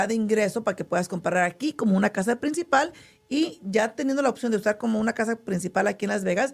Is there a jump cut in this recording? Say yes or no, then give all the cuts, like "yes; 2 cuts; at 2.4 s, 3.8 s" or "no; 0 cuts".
no; 0 cuts